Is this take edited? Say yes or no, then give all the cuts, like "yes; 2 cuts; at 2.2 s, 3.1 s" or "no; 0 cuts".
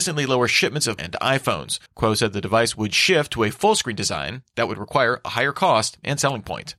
yes; 2 cuts; at 1.0 s, 1.9 s